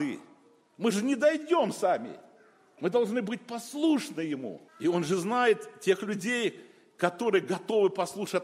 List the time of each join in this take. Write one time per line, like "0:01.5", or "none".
0:04.7